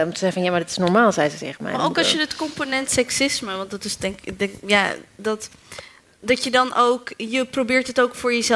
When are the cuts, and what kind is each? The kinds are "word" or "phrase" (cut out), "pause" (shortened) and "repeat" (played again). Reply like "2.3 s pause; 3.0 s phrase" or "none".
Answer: none